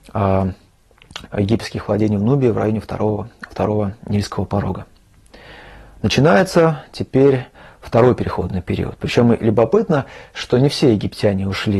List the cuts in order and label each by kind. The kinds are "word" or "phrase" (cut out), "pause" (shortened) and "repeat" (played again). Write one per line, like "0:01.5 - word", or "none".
0:01.3 - word